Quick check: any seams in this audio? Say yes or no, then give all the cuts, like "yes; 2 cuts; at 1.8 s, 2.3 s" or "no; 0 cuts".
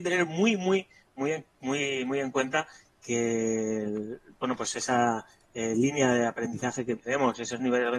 no; 0 cuts